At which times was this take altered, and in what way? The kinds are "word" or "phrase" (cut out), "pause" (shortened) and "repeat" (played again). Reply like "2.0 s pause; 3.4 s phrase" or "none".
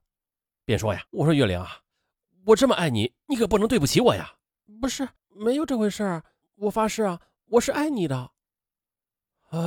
1.1 s pause; 5.2 s pause; 6.4 s pause